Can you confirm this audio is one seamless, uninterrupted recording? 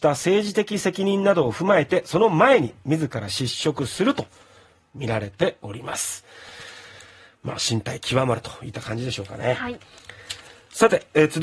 yes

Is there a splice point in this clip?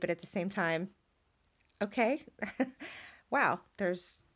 no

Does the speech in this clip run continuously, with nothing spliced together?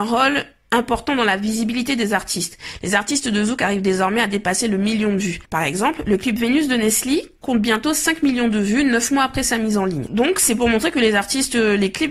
no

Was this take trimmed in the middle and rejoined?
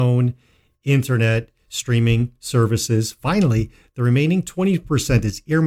no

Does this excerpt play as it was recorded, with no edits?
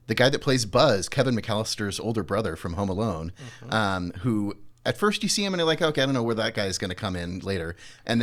yes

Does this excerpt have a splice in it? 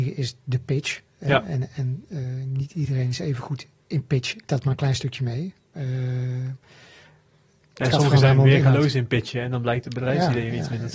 yes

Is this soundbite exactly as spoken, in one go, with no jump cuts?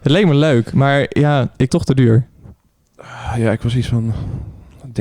no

